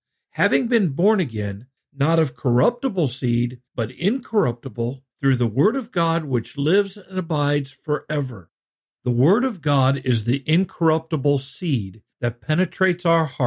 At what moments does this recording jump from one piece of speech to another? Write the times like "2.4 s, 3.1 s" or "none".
1.8 s, 3.7 s, 5.1 s, 8.7 s, 12.1 s